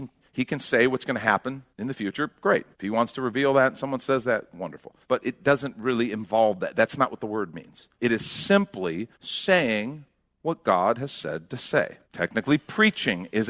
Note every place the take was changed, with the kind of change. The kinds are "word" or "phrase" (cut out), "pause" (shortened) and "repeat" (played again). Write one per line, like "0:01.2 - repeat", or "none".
0:01.7 - pause
0:02.7 - pause
0:05.0 - pause
0:07.9 - pause
0:09.1 - pause
0:12.0 - pause